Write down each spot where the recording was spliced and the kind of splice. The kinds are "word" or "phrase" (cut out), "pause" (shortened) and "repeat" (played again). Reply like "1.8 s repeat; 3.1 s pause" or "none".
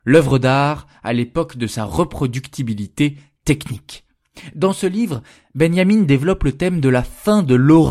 none